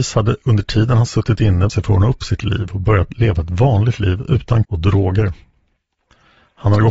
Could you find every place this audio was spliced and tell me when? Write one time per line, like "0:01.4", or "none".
0:01.7
0:04.6